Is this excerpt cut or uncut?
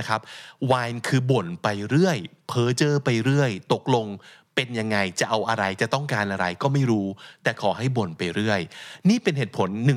uncut